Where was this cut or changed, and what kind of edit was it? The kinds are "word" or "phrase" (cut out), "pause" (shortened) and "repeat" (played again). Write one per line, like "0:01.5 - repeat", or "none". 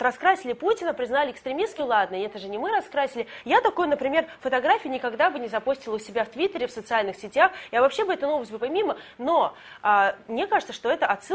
0:01.8 - word
0:08.6 - word